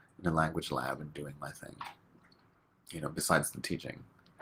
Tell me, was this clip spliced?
no; 0 cuts

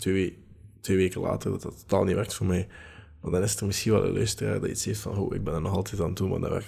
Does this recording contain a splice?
no; 0 cuts

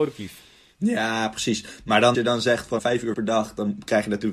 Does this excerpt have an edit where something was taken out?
yes; 3 cuts; at 2.1 s, 2.8 s, 3.1 s

